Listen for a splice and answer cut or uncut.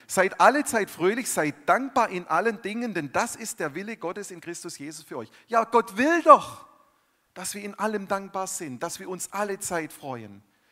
uncut